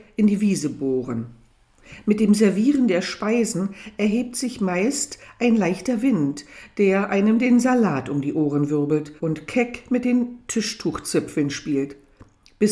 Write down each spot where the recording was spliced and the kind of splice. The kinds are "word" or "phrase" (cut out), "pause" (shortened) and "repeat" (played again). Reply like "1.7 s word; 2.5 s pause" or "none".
9.2 s pause